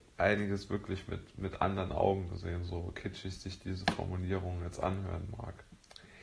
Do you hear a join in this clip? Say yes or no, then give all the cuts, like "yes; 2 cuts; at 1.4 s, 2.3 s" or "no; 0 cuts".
no; 0 cuts